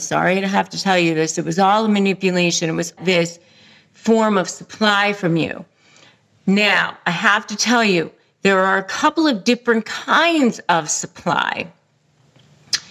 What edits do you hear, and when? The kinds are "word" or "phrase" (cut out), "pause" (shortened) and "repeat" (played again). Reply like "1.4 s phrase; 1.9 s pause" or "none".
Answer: 3.0 s phrase